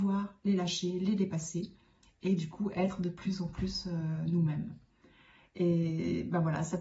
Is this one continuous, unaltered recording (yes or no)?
yes